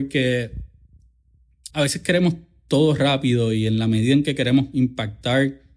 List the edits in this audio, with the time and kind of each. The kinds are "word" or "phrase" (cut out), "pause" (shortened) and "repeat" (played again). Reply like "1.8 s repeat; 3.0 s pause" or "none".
1.7 s pause